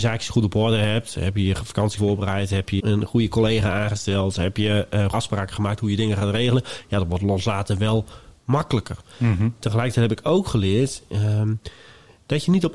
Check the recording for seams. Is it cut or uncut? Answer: cut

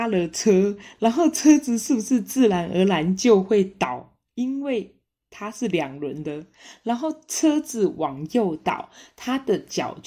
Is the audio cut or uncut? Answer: uncut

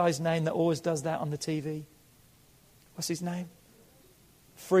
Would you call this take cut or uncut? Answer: uncut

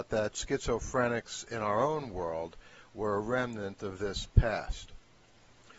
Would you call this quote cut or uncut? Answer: uncut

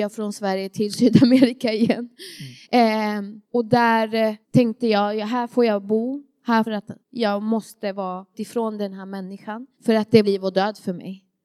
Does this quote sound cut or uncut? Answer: cut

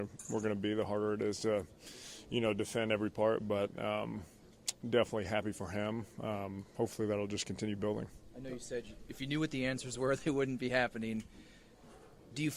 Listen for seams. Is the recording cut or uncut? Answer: uncut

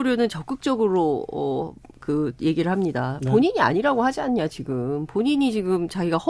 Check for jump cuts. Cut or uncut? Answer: uncut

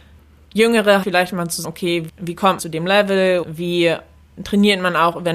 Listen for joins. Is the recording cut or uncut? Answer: cut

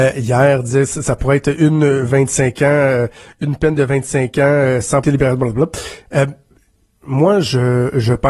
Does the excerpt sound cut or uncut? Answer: cut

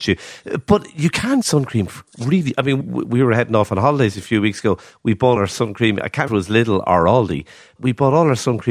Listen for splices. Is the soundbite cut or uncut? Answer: cut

